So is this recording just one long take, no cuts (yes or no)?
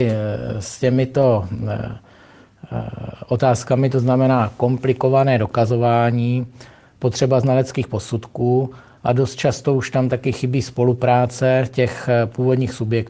yes